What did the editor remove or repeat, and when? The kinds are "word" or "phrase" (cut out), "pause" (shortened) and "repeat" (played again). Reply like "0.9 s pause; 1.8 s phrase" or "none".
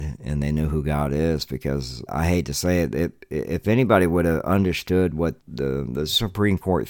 2.1 s word; 5.4 s word